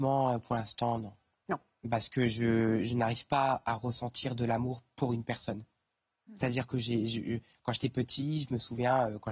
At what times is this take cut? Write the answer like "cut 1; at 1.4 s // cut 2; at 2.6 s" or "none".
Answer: none